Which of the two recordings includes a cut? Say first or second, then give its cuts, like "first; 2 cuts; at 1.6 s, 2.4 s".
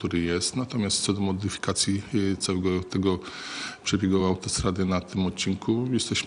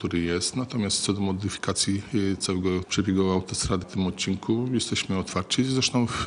second; 2 cuts; at 2.8 s, 3.8 s